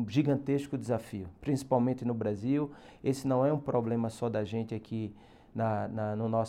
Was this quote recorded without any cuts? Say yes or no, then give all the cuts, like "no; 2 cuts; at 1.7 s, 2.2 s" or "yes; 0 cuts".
yes; 0 cuts